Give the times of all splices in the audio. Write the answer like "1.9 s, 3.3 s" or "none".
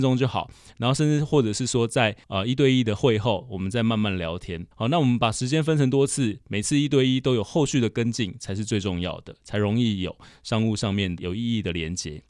2.2 s, 4.7 s